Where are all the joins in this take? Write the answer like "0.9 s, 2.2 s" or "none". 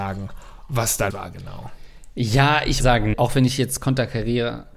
1.1 s, 2.8 s, 3.1 s